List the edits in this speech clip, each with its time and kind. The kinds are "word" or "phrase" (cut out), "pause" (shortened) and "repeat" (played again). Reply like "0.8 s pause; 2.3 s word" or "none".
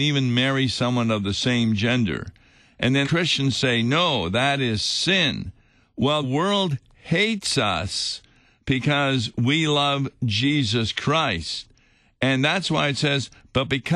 3.0 s word; 6.2 s word